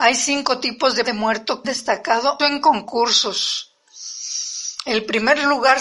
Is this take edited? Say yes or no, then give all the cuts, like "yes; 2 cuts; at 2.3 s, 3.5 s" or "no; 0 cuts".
yes; 3 cuts; at 1.0 s, 1.6 s, 2.4 s